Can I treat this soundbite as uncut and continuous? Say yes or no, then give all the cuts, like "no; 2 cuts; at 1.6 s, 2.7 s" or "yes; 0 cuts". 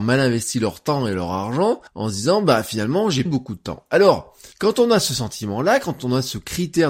no; 3 cuts; at 1.9 s, 3.3 s, 4.5 s